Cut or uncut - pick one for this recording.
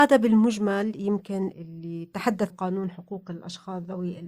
cut